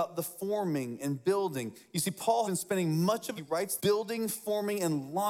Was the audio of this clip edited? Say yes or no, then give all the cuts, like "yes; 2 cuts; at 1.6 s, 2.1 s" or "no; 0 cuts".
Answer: yes; 3 cuts; at 2.4 s, 3.4 s, 3.8 s